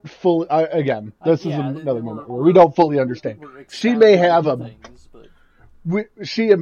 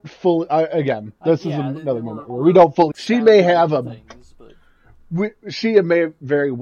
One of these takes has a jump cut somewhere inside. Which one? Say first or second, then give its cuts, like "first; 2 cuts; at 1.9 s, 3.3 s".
second; 1 cut; at 2.9 s